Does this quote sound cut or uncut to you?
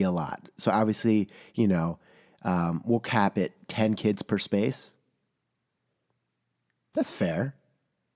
uncut